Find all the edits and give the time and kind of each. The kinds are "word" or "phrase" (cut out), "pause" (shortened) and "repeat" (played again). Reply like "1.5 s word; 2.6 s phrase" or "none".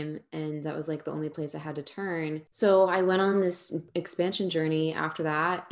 none

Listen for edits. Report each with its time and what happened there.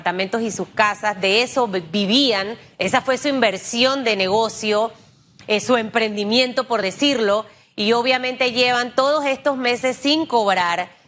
none

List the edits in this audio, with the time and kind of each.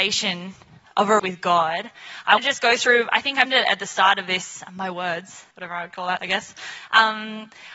1.2 s word; 2.4 s word; 3.5 s word; 4.7 s word; 5.5 s pause; 6.2 s word

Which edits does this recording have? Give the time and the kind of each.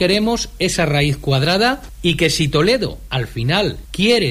none

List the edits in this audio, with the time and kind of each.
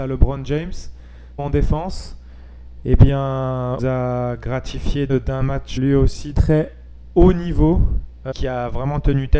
1.4 s word; 3.8 s phrase; 5.1 s word; 5.8 s word; 6.3 s word; 8.3 s word

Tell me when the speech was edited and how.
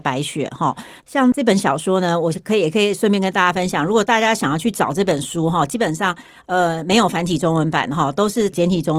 none

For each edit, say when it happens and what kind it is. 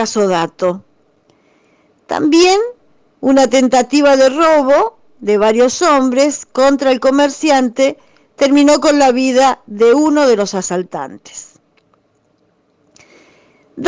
none

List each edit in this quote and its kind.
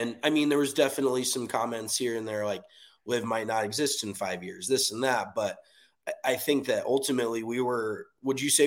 none

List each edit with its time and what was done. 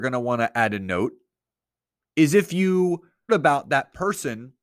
3.3 s word

